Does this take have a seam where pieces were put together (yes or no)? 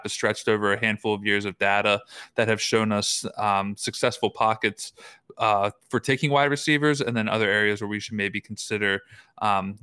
no